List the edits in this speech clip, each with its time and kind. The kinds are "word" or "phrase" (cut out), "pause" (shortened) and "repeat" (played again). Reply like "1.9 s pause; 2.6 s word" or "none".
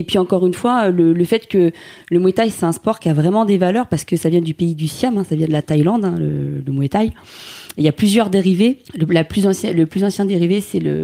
8.8 s pause